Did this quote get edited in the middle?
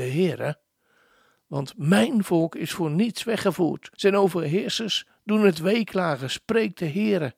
yes; 1 cut; at 3.9 s

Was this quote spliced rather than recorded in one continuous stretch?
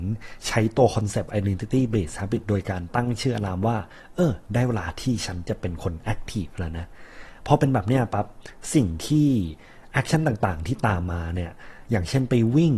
no; 0 cuts

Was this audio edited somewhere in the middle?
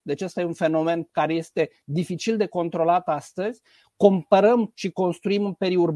no; 0 cuts

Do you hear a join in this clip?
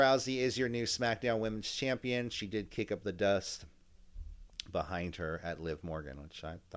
no; 0 cuts

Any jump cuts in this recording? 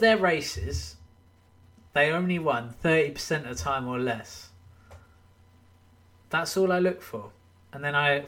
no; 0 cuts

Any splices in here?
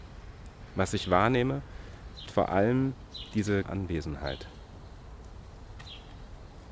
yes; 2 cuts; at 2.3 s, 3.6 s

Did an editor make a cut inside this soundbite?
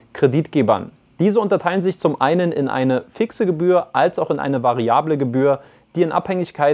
no; 0 cuts

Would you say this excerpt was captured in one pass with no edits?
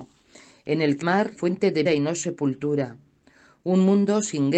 no; 3 cuts; at 1.0 s, 1.4 s, 1.9 s

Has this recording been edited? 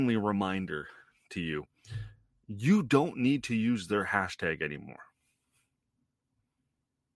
no; 0 cuts

